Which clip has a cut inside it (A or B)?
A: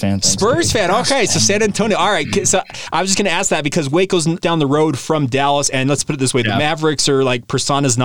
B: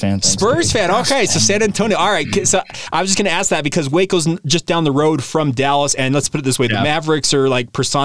A